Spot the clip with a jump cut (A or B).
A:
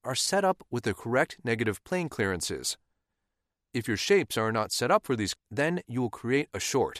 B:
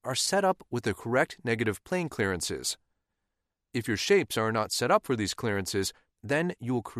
A